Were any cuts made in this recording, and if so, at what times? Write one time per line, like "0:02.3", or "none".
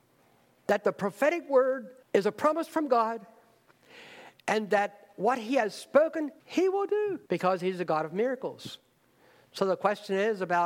0:02.0
0:06.4
0:07.3